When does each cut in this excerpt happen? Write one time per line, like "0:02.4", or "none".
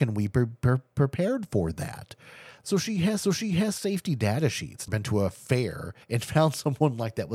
0:03.2
0:04.9
0:06.0